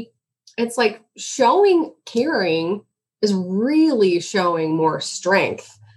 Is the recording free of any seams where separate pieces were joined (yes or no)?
yes